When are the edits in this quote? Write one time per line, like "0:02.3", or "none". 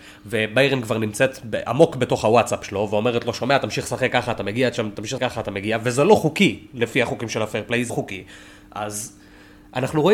0:05.2
0:07.9